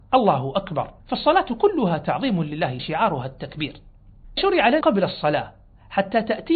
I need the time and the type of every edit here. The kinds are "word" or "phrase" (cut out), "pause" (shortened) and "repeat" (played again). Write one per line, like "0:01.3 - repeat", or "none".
0:01.0 - pause
0:02.8 - phrase
0:04.4 - word
0:04.8 - word